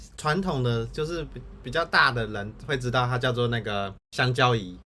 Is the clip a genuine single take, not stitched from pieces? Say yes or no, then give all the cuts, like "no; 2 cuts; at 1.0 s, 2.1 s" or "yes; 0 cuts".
no; 1 cut; at 4.0 s